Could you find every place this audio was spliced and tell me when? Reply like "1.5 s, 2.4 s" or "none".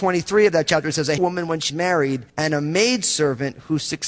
1.2 s, 1.7 s, 2.3 s